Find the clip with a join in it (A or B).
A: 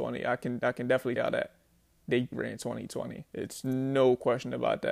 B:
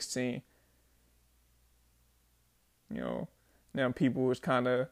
A